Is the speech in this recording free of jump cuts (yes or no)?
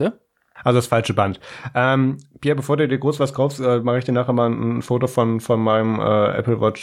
yes